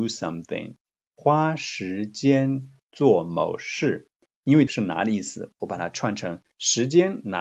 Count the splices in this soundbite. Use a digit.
1